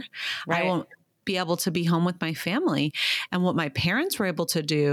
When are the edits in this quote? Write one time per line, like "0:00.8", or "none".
none

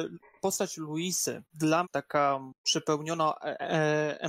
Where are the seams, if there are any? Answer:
0:01.5
0:01.8
0:02.6

